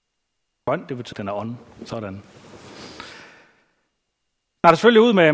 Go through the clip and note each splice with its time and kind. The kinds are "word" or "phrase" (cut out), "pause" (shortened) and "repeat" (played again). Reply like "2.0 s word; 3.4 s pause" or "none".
1.1 s word

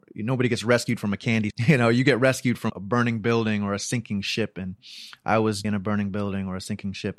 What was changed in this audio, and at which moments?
1.5 s word; 2.7 s word; 5.6 s word

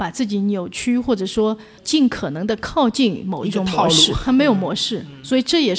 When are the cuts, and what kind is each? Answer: 1.8 s word

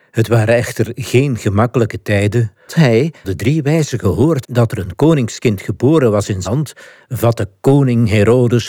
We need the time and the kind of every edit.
2.7 s word; 3.2 s word; 4.4 s word; 6.4 s word

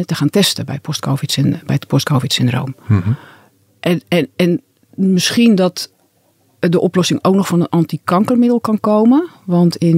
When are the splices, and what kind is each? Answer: none

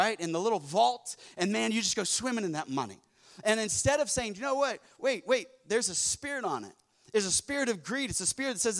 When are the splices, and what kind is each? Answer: none

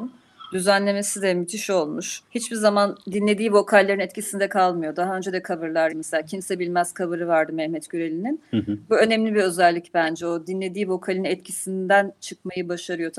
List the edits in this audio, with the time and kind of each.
2.3 s pause; 5.9 s word

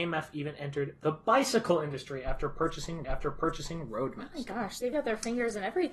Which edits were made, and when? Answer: 3.0 s repeat; 4.9 s word

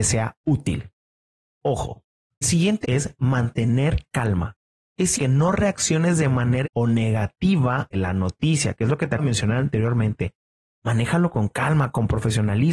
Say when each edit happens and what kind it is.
2.4 s word; 2.8 s word; 4.1 s word; 5.2 s word; 6.6 s word; 7.9 s word; 9.2 s word

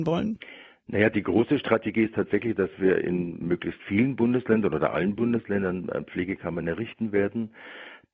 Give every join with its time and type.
none

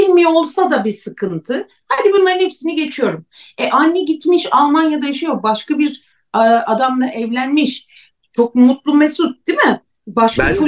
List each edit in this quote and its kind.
none

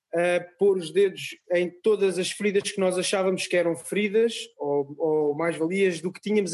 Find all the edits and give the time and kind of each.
none

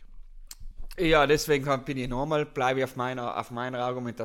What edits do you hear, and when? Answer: none

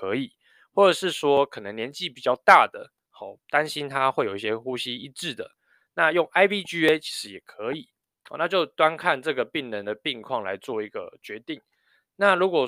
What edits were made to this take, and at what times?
none

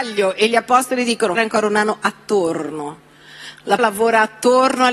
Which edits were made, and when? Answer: 1.4 s phrase; 3.8 s word

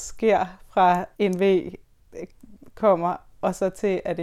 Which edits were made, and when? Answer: 1.1 s pause

